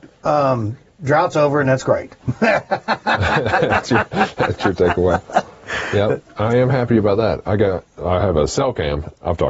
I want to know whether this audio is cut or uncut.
uncut